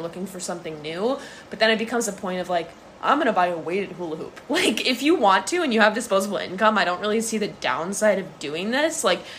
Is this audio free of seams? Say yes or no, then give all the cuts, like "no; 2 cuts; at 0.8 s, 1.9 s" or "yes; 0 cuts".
yes; 0 cuts